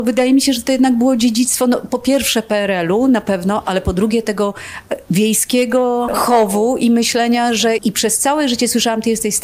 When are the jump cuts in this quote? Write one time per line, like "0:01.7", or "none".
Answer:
0:06.1
0:07.8